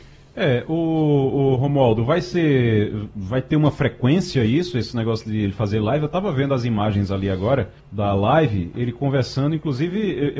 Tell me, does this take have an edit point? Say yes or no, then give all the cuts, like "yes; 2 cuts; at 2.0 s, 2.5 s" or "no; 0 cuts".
yes; 1 cut; at 7.8 s